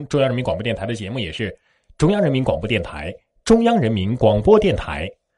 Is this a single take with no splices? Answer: yes; 0 cuts

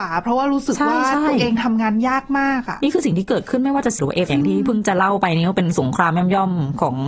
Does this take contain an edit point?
yes; 2 cuts; at 4.0 s, 4.3 s

